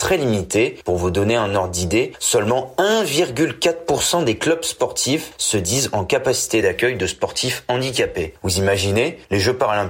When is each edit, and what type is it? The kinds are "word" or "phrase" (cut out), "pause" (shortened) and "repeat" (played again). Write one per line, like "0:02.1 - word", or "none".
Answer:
none

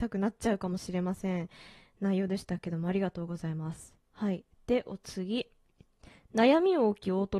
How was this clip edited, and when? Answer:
none

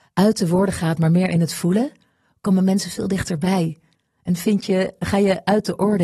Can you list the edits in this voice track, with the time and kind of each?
none

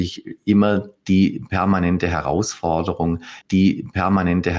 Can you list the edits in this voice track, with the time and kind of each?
0:03.4 - repeat

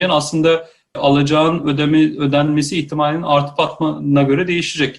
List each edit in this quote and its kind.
none

